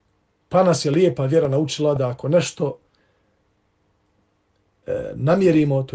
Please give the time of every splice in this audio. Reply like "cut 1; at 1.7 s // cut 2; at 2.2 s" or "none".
none